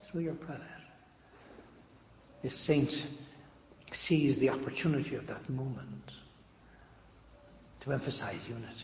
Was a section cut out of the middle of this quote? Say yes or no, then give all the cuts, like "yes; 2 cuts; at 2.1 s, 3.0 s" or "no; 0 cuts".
no; 0 cuts